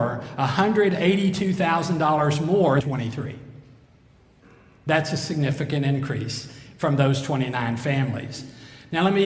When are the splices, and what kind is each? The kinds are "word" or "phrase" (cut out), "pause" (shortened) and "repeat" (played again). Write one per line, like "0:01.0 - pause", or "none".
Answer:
0:02.8 - phrase